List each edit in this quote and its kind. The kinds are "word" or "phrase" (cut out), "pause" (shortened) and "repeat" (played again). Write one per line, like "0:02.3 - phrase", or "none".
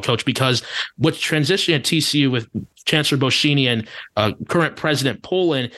none